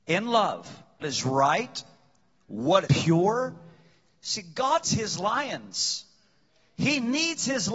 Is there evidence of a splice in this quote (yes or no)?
yes